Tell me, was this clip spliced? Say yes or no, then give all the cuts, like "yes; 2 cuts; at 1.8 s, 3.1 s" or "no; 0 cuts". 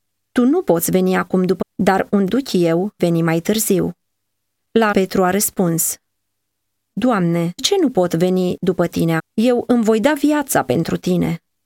yes; 6 cuts; at 1.6 s, 2.3 s, 3.0 s, 4.9 s, 7.6 s, 9.2 s